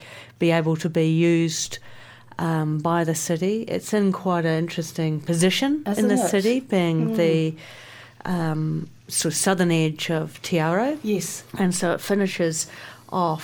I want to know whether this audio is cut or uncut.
cut